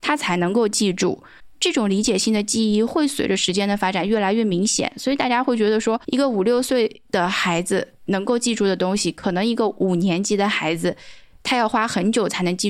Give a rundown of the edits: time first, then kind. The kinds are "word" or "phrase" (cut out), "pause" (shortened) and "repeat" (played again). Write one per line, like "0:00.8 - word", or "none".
0:06.0 - pause